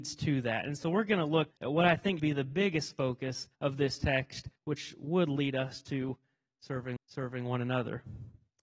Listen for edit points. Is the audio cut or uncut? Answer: cut